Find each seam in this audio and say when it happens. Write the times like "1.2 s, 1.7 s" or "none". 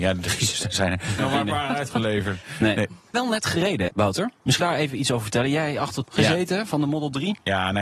1.2 s, 3.1 s, 3.9 s, 4.6 s, 6.0 s